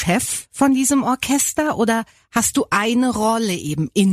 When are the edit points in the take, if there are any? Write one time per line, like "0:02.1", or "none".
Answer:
none